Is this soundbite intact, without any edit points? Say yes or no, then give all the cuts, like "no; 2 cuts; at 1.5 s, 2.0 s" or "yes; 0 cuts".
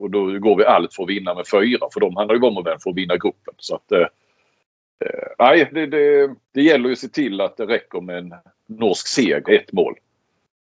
no; 4 cuts; at 2.6 s, 5.7 s, 6.4 s, 9.5 s